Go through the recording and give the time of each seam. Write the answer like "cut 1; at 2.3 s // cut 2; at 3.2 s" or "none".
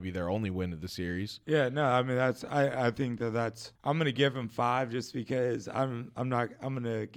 cut 1; at 3.8 s